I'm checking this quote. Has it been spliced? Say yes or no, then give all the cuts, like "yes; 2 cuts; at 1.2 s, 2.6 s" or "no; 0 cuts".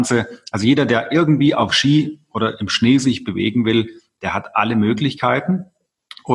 no; 0 cuts